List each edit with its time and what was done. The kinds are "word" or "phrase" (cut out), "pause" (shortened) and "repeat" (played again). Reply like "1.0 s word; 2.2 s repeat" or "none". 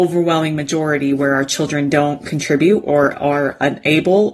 none